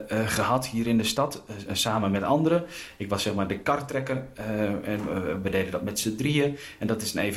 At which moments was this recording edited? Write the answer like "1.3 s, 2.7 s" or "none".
1.7 s